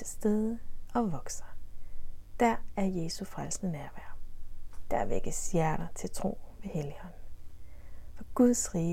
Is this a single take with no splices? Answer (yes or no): yes